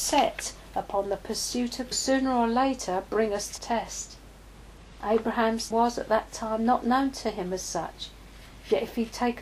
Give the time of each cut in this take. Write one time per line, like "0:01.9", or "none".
0:01.9
0:03.6
0:05.7